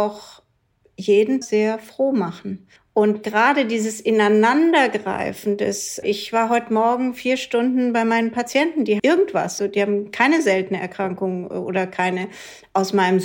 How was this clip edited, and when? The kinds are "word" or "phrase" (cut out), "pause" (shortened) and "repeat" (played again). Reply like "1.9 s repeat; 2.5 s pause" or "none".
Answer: 1.4 s phrase; 2.8 s pause; 6.0 s word; 9.0 s word; 9.6 s word